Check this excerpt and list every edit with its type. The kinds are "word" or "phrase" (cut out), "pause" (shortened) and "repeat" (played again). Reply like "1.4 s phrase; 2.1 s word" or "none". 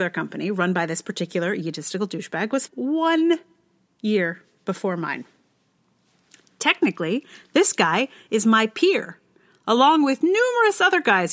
2.7 s word